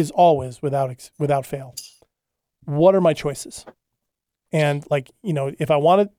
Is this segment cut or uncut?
uncut